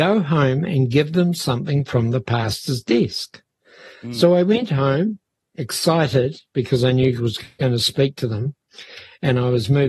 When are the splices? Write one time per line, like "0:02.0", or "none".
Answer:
0:07.2